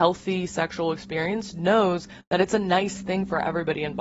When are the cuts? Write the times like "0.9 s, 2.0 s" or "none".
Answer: none